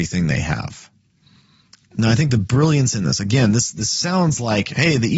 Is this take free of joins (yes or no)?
yes